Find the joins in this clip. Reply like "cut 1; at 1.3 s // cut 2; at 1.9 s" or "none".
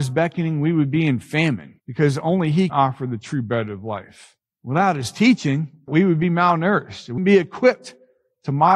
cut 1; at 1.8 s // cut 2; at 2.7 s // cut 3; at 4.4 s // cut 4; at 5.9 s // cut 5; at 7.2 s